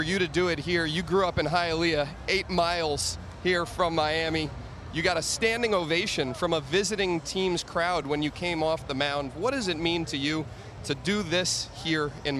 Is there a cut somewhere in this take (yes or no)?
no